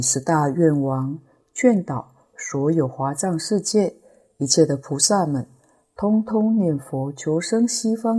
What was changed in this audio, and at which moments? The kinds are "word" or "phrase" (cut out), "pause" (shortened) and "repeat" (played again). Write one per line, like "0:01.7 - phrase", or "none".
none